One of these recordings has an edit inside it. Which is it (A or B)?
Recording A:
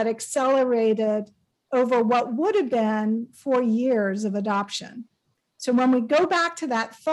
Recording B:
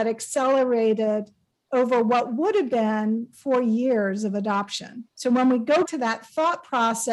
B